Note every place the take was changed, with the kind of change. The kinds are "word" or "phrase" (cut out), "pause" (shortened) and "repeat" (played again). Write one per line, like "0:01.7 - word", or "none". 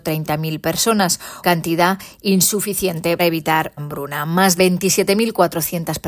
0:01.4 - word
0:03.2 - word
0:03.8 - word
0:04.6 - word